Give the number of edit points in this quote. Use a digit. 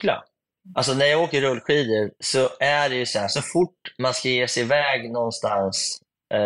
1